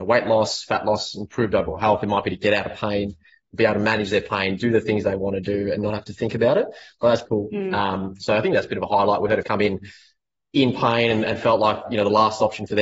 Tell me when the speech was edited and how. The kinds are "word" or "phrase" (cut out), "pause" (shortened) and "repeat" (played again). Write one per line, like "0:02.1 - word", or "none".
0:07.3 - word
0:09.4 - phrase